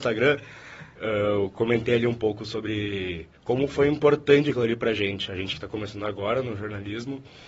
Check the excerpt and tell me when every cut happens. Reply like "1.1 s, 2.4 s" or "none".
3.4 s